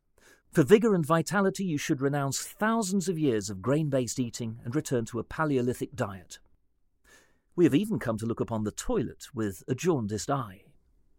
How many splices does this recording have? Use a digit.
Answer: 0